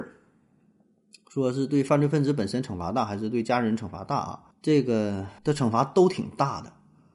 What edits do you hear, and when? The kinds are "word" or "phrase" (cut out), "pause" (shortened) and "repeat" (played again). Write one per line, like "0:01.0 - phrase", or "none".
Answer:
0:04.5 - pause
0:05.4 - pause